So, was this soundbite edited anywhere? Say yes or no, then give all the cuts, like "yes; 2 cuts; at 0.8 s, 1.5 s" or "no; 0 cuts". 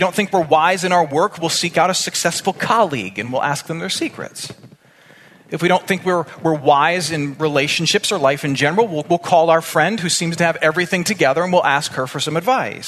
no; 0 cuts